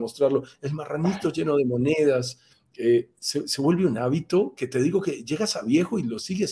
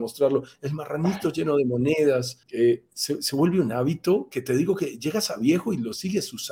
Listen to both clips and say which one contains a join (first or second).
second